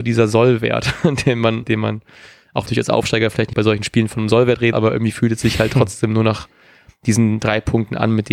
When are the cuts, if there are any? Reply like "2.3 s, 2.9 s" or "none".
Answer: 1.6 s, 2.7 s, 3.5 s, 4.7 s